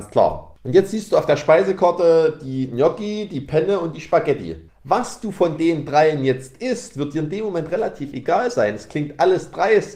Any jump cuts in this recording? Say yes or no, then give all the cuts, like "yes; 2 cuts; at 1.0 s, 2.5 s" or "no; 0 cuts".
yes; 1 cut; at 4.7 s